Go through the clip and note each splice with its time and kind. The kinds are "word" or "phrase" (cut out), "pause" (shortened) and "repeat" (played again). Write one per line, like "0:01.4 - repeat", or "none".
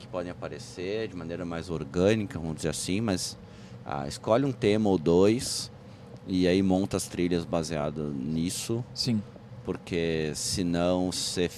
none